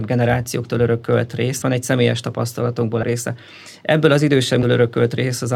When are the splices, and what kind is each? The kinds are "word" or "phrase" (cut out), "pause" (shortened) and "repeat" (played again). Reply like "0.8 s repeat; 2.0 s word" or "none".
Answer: 1.6 s word; 3.0 s word; 4.6 s word